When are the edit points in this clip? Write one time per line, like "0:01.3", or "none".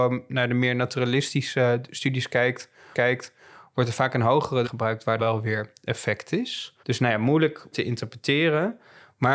0:02.9
0:04.6
0:05.2
0:06.8
0:07.7